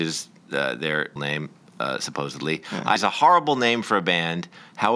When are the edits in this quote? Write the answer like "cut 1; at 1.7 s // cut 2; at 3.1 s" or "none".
cut 1; at 1.2 s // cut 2; at 3.0 s